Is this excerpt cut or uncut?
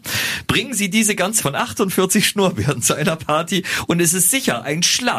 cut